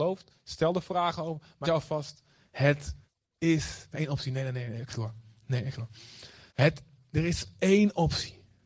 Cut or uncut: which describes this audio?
cut